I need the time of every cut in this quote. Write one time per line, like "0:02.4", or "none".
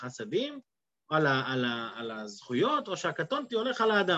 none